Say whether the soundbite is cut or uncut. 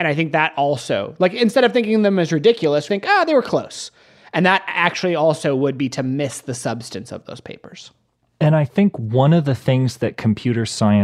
cut